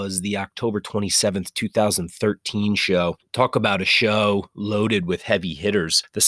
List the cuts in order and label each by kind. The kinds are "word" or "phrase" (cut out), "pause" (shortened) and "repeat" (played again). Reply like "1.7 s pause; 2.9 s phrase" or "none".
none